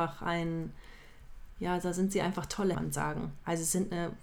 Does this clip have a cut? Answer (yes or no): yes